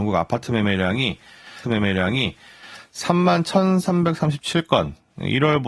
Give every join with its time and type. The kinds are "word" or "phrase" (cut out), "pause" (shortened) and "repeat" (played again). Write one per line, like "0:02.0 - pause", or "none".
0:01.6 - repeat